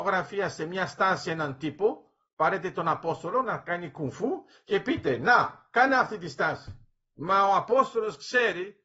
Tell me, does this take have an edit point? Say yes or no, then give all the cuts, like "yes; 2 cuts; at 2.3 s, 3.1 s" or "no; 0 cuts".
no; 0 cuts